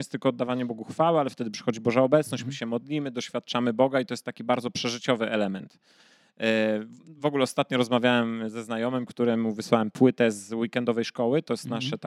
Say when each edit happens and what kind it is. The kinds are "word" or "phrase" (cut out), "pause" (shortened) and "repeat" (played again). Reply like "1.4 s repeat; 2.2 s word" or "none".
none